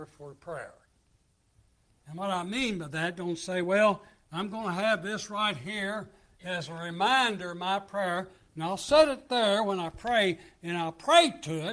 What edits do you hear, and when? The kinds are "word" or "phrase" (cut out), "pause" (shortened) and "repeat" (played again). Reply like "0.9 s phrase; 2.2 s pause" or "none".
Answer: none